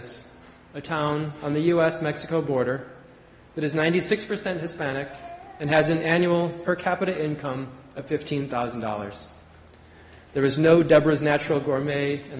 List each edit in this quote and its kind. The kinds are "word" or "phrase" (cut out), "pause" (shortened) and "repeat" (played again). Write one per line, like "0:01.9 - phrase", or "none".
none